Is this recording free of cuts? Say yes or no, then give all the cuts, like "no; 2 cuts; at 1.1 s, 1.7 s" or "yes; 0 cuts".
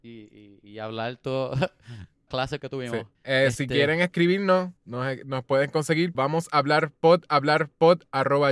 no; 6 cuts; at 2.3 s, 2.6 s, 3.1 s, 4.8 s, 6.1 s, 7.3 s